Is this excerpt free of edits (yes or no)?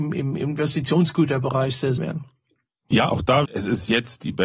no